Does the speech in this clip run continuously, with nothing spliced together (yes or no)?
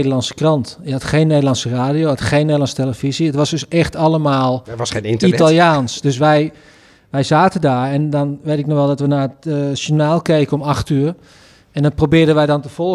yes